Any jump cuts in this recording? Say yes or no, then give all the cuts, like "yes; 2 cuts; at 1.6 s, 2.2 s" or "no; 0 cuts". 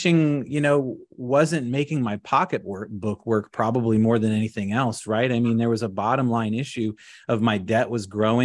no; 0 cuts